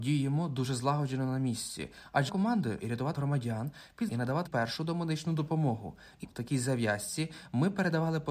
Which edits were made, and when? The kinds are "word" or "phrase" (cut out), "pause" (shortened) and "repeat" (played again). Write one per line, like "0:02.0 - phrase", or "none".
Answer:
0:02.3 - word
0:02.8 - word
0:03.1 - word
0:04.1 - word
0:04.5 - word
0:06.2 - word